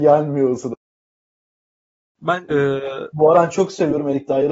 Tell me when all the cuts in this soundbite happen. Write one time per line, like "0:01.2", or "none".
0:02.5
0:03.3